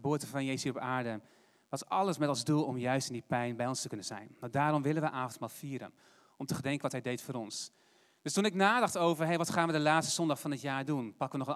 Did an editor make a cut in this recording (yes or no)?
no